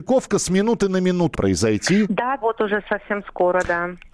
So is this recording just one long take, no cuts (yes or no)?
no